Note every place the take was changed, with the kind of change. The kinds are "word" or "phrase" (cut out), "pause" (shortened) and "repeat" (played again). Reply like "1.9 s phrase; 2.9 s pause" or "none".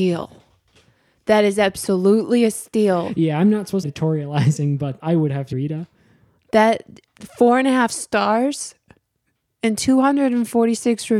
3.8 s phrase; 5.0 s word; 5.5 s word